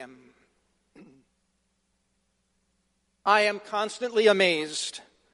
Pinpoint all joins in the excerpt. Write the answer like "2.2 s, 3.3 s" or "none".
none